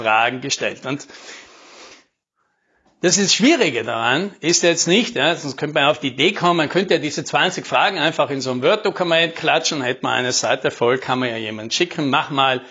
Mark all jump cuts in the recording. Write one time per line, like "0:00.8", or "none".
none

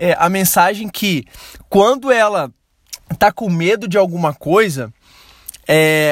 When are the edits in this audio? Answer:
none

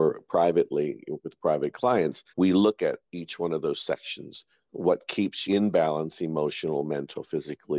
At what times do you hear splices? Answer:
0:02.3
0:03.0
0:05.4

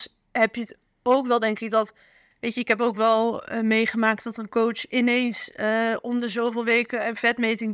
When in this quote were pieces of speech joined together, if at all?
none

